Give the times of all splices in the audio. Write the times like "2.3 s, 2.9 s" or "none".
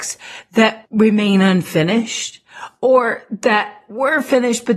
none